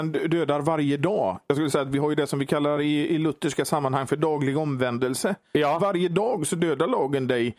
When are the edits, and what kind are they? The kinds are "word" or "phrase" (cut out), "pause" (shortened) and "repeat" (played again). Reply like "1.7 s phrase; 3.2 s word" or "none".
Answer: none